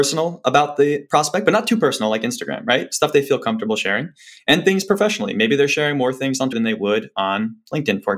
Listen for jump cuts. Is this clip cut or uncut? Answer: cut